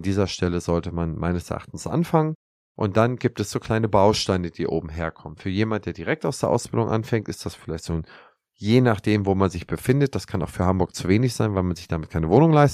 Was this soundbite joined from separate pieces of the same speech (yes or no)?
no